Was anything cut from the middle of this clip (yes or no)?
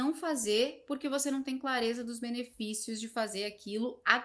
no